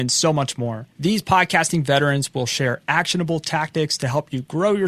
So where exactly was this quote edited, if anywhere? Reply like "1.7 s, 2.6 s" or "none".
0.9 s